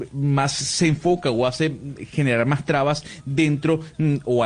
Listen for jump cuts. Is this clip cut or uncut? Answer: uncut